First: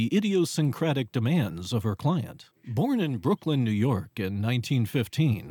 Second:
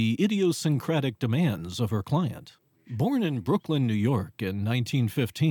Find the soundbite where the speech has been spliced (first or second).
first